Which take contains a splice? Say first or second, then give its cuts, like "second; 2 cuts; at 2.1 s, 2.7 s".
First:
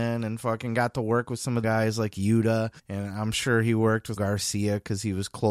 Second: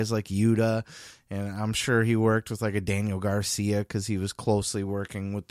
first; 3 cuts; at 1.6 s, 2.8 s, 4.2 s